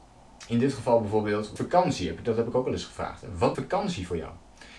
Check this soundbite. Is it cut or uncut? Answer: cut